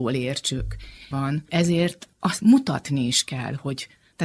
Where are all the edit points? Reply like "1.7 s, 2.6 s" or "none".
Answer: 1.1 s, 1.5 s

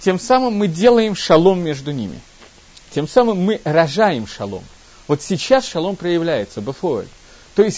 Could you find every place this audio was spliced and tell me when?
none

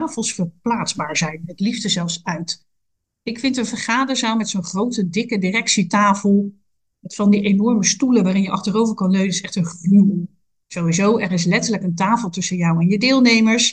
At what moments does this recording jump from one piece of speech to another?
none

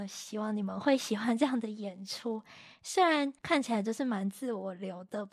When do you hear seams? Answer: 3.4 s

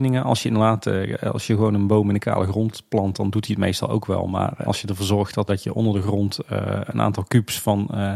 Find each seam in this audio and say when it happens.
4.6 s, 5.5 s

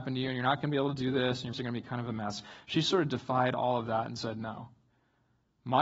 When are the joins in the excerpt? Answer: 1.5 s

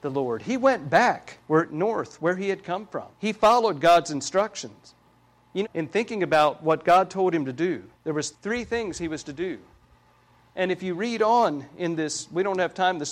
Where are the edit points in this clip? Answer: 1.4 s, 3.1 s, 5.6 s, 7.9 s, 8.3 s

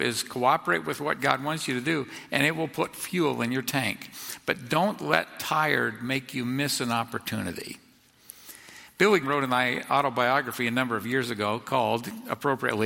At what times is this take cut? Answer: 9.2 s

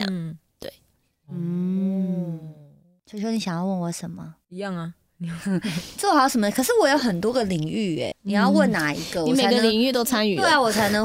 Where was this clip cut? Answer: 8.1 s

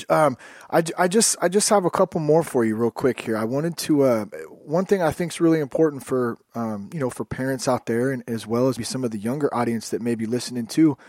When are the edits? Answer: 8.8 s

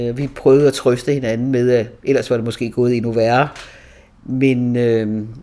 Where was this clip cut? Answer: none

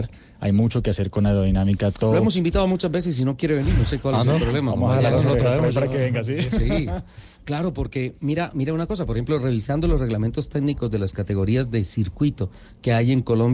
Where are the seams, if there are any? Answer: 8.2 s

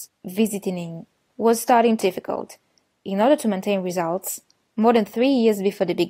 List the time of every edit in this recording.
1.3 s, 2.0 s

